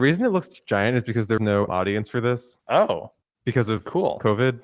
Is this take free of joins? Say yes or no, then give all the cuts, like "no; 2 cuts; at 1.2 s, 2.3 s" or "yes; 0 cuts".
no; 3 cuts; at 1.4 s, 1.7 s, 2.6 s